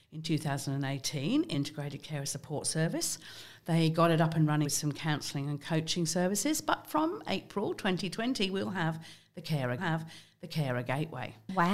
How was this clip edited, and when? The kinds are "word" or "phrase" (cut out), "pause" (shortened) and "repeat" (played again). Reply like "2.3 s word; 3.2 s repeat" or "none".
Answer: 1.5 s word; 4.6 s phrase; 9.8 s repeat